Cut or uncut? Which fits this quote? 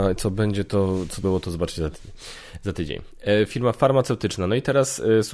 cut